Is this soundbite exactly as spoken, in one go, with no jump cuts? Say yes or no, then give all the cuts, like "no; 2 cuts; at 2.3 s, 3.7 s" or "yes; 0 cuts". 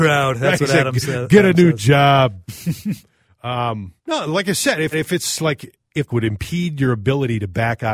no; 3 cuts; at 4.0 s, 4.9 s, 6.1 s